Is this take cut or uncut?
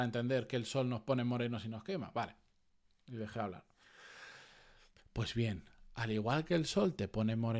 uncut